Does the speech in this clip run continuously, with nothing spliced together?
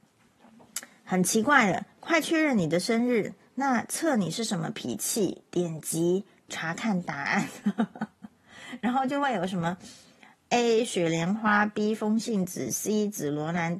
yes; 0 cuts

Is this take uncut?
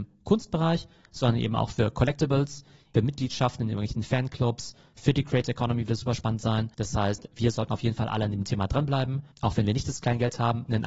no; 3 cuts; at 2.9 s, 6.7 s, 9.3 s

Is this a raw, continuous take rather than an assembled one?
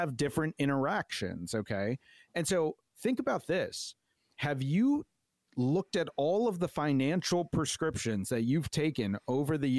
yes; 0 cuts

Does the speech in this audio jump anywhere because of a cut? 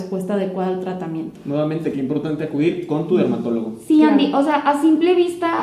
no; 0 cuts

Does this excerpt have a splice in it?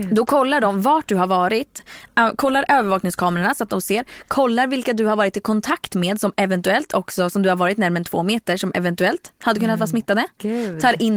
no; 0 cuts

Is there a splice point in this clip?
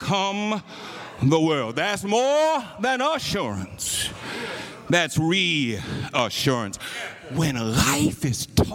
no; 0 cuts

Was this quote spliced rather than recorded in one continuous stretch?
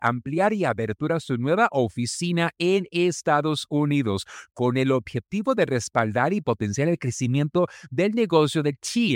no; 0 cuts

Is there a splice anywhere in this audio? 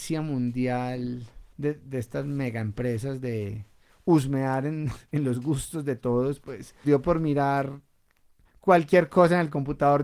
yes; 2 cuts; at 1.5 s, 6.8 s

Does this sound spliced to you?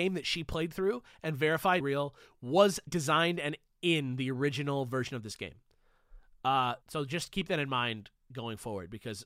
yes; 3 cuts; at 1.8 s, 2.9 s, 6.8 s

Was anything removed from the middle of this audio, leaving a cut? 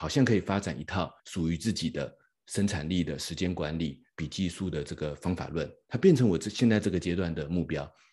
yes; 1 cut; at 1.2 s

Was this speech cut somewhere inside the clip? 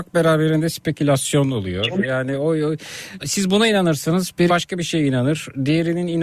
yes; 2 cuts; at 3.2 s, 4.5 s

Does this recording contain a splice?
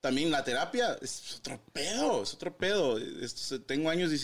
no; 0 cuts

